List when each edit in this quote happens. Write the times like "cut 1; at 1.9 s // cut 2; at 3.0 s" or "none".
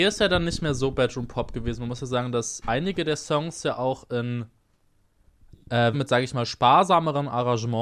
cut 1; at 2.6 s // cut 2; at 5.9 s